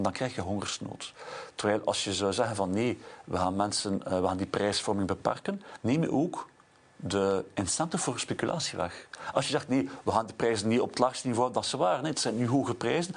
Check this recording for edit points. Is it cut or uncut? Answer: uncut